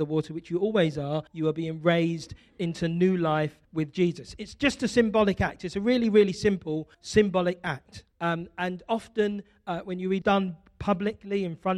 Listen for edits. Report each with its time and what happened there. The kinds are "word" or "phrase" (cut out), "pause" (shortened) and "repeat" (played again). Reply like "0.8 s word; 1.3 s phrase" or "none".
1.3 s pause; 3.6 s pause; 6.9 s pause; 8.1 s pause; 10.2 s phrase